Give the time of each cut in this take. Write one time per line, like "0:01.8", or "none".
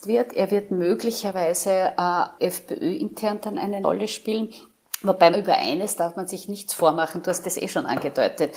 0:02.4
0:03.8
0:05.3